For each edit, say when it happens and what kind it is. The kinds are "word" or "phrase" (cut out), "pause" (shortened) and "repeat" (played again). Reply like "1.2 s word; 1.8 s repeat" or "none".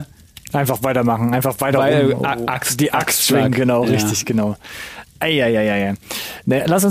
none